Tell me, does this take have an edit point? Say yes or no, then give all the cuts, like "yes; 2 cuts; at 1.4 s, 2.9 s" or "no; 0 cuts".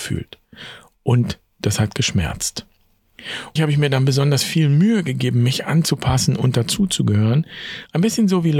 yes; 1 cut; at 3.6 s